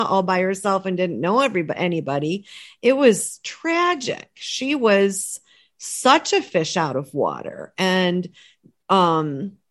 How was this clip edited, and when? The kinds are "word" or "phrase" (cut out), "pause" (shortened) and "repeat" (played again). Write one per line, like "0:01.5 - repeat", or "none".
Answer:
none